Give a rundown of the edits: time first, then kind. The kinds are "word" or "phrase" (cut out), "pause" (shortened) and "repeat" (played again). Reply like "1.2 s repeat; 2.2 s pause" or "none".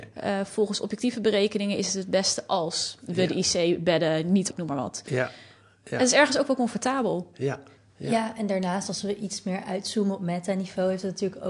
4.5 s word; 7.8 s pause